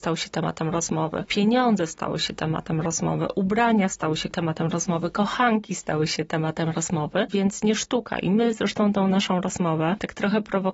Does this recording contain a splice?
no; 0 cuts

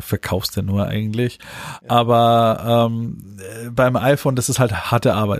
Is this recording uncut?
yes; 0 cuts

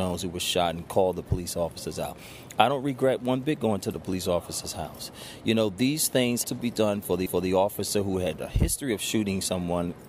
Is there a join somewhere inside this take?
yes; 2 cuts; at 6.4 s, 7.3 s

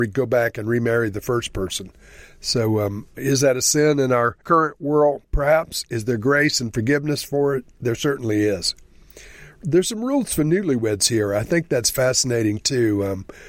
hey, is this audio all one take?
no; 1 cut; at 4.4 s

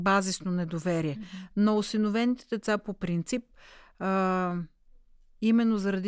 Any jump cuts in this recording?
no; 0 cuts

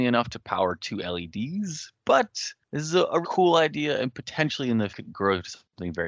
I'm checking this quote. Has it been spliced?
yes; 2 cuts; at 3.2 s, 4.9 s

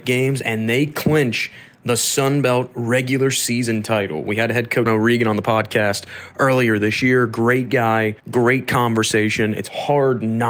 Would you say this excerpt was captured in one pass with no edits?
no; 2 cuts; at 4.9 s, 8.2 s

